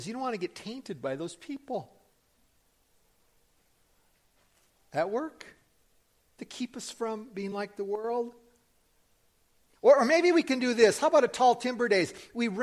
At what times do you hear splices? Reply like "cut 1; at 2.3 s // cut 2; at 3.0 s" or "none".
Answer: none